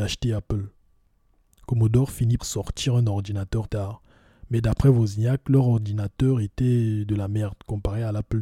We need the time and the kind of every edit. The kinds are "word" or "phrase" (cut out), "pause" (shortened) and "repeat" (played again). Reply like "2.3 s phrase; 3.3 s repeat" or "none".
2.4 s word; 3.7 s word